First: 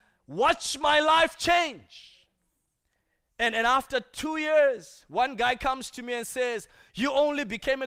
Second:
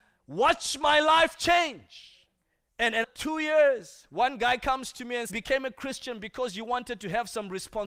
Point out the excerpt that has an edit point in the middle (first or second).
second